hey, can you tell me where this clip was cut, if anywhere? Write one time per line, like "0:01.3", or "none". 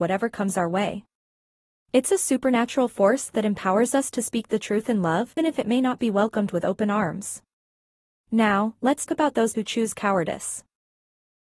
0:05.4
0:09.1
0:09.5